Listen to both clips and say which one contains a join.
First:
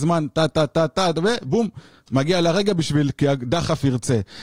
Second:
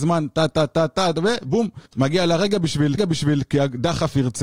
second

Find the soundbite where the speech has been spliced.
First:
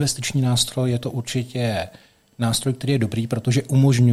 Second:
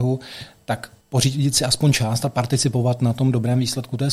second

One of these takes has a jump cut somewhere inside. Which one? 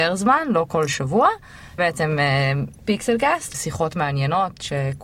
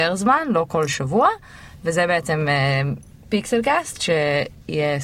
first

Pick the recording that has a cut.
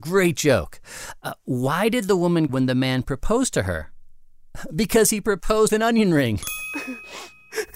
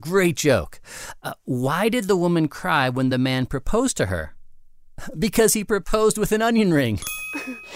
first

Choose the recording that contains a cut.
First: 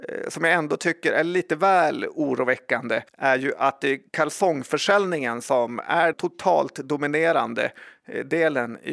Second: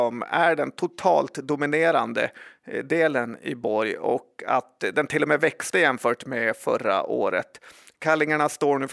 first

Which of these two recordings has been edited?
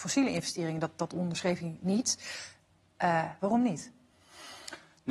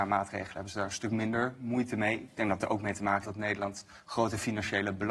second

